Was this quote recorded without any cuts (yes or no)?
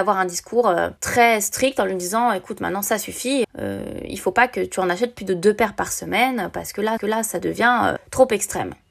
no